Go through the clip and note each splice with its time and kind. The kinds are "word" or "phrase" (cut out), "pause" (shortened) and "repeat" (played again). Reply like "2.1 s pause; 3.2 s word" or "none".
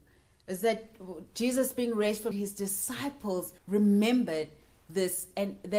2.3 s phrase; 3.6 s pause